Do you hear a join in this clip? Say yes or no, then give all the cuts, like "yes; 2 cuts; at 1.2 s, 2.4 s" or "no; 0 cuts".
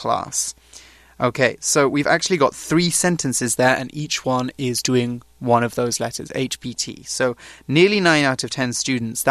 no; 0 cuts